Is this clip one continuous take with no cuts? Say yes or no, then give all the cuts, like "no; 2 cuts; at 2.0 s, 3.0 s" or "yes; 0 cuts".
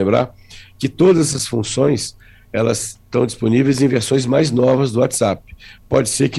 yes; 0 cuts